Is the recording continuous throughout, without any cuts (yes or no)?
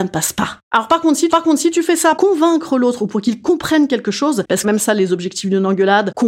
no